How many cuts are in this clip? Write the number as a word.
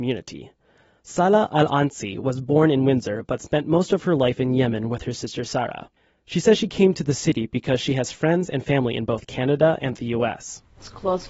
zero